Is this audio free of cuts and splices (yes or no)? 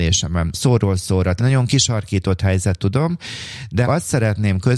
no